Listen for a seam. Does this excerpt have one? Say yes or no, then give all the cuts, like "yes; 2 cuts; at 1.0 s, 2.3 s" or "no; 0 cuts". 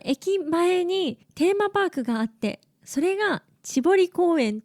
yes; 1 cut; at 1.2 s